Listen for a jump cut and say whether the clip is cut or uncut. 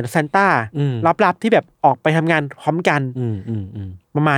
cut